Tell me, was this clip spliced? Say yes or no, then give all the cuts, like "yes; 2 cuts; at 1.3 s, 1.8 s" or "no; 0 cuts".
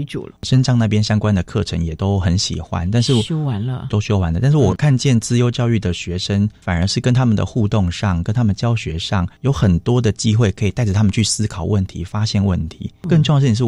yes; 1 cut; at 3.9 s